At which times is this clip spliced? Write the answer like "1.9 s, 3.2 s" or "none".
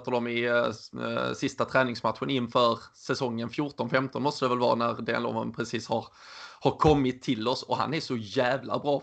none